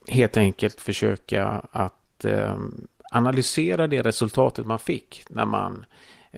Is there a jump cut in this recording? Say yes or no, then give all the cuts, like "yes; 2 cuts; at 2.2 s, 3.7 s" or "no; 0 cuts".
no; 0 cuts